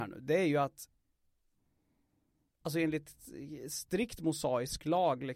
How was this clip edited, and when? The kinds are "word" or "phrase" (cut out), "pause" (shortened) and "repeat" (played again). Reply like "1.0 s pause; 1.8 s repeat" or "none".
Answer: none